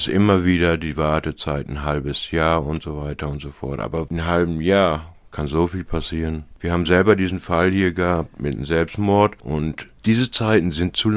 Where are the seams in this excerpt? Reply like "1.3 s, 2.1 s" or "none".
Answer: none

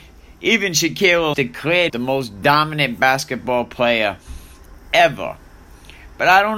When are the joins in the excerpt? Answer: 1.3 s, 1.9 s

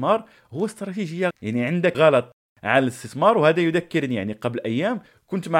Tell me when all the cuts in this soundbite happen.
1.3 s, 1.9 s

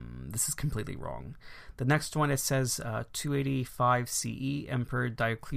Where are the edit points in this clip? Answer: none

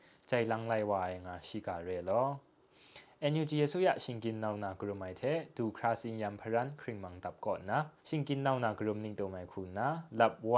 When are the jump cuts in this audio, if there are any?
8.0 s

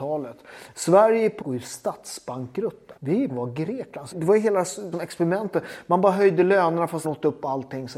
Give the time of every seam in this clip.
1.4 s, 3.0 s, 3.3 s, 4.1 s, 4.9 s, 7.0 s

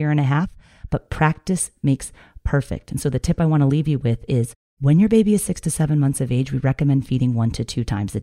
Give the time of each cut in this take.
none

